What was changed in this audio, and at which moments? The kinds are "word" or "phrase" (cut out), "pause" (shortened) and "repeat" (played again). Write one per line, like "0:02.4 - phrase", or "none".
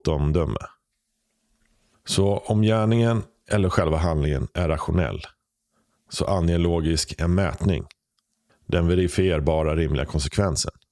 none

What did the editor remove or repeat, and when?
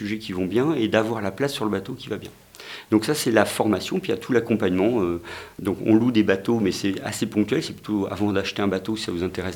none

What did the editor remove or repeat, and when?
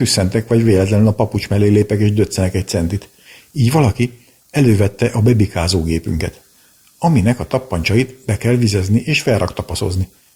none

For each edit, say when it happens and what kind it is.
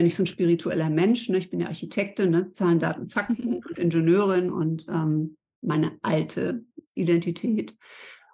0:06.8 - pause

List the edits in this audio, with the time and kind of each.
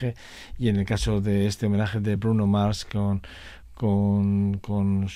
none

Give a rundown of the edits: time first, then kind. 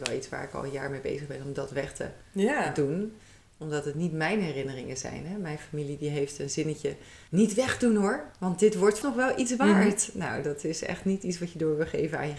0:07.3 - pause
0:09.0 - word

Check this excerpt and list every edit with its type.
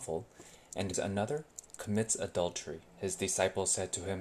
0:00.9 - word
0:02.9 - pause

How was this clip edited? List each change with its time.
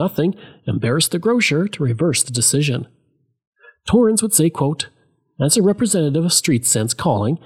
none

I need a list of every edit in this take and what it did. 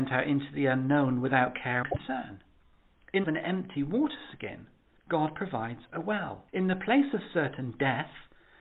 0:01.8 - word
0:03.2 - phrase
0:04.9 - pause
0:06.5 - pause

